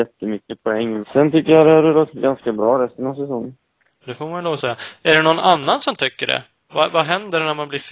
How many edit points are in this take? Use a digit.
2